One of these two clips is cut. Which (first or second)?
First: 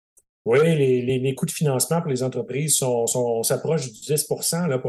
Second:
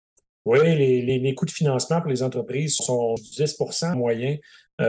second